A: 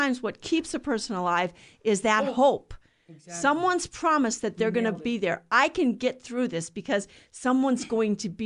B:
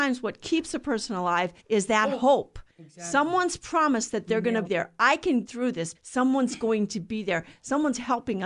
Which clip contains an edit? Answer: B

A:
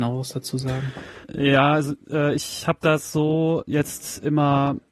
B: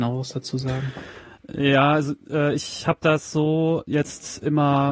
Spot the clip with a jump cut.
A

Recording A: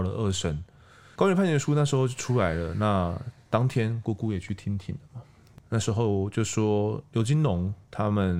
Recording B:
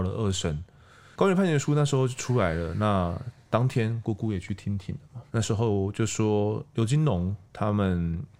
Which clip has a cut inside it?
B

